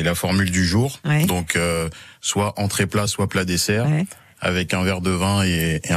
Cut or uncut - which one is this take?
uncut